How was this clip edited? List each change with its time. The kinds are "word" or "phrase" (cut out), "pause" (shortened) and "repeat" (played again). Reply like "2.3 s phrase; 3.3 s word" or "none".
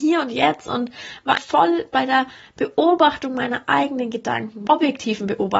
1.4 s word; 4.7 s word

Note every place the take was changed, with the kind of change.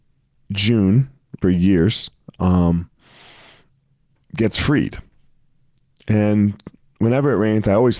1.4 s phrase

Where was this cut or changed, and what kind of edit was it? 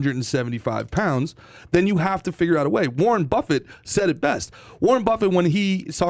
none

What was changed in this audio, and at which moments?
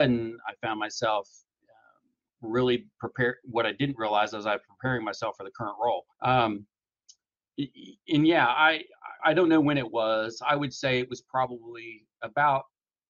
6.1 s pause; 9.2 s word

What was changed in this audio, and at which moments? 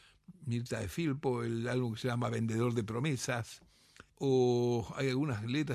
4.1 s pause

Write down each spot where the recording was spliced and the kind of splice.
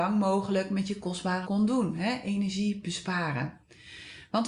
1.4 s word

